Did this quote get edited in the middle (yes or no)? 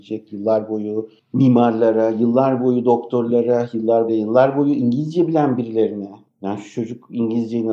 yes